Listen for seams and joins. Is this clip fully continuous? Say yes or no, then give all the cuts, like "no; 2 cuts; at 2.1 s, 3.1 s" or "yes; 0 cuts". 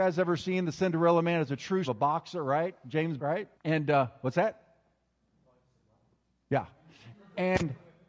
no; 3 cuts; at 1.8 s, 3.2 s, 3.5 s